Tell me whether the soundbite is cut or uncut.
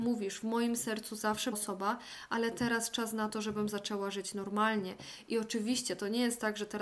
cut